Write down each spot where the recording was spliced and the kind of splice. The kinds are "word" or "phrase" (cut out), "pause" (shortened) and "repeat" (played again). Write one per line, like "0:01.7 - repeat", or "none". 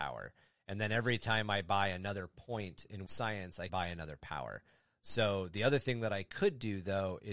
0:03.1 - word
0:03.7 - word